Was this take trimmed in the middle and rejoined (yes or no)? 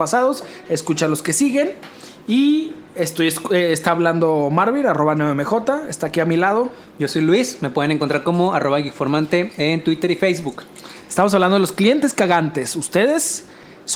no